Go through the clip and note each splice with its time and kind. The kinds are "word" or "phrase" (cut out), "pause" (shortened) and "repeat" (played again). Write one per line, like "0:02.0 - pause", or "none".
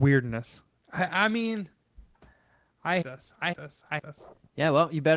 0:02.1 - word
0:03.0 - word
0:03.5 - word
0:04.0 - word